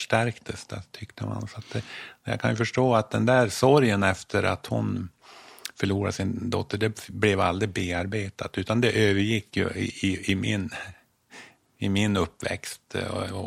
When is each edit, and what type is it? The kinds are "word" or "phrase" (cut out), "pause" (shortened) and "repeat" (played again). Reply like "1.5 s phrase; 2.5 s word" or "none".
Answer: none